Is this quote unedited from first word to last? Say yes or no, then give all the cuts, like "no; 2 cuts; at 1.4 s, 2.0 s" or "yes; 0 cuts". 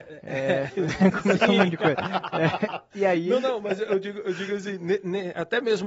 yes; 0 cuts